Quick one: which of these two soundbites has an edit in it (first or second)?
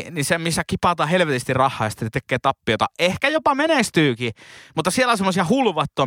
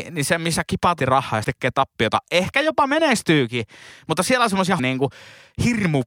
second